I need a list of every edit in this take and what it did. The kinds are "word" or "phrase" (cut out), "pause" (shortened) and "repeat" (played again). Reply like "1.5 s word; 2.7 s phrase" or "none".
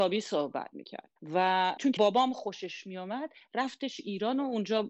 1.2 s pause; 2.0 s word